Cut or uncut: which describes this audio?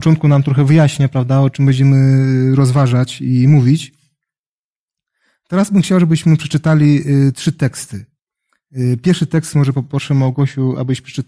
uncut